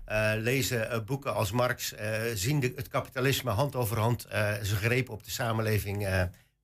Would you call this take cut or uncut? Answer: uncut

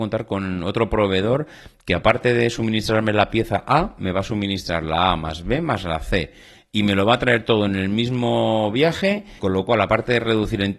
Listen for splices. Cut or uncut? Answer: cut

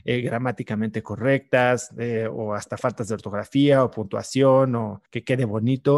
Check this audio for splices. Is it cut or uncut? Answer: cut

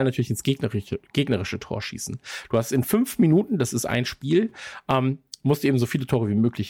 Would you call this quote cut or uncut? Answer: uncut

